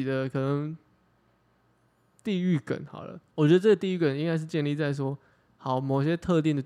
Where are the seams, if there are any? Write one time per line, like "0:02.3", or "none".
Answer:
0:03.3